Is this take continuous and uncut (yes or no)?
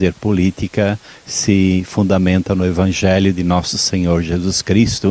yes